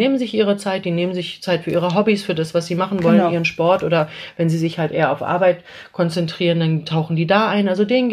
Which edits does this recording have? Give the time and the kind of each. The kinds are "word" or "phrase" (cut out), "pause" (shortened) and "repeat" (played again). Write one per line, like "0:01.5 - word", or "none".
none